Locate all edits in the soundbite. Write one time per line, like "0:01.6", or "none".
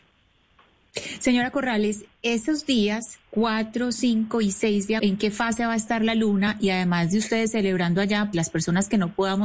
0:05.0
0:08.3

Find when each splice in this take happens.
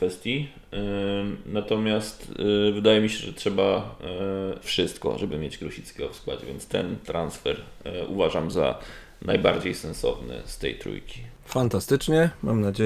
0:04.6

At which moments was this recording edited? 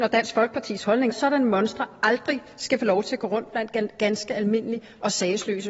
0:01.1

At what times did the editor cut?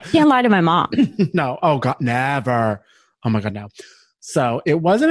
none

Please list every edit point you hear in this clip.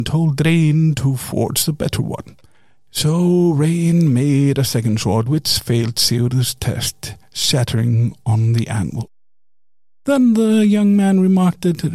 none

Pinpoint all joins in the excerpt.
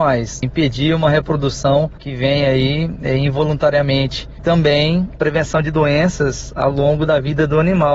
0:04.4

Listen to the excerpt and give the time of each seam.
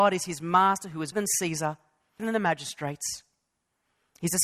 0:01.1
0:02.2

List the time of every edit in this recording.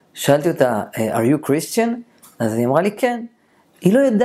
none

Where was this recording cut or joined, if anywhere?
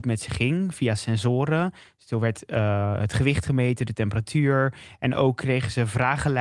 none

